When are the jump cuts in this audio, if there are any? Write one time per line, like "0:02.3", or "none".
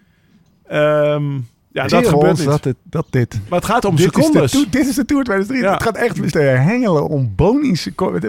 0:01.9
0:03.8
0:06.3
0:07.1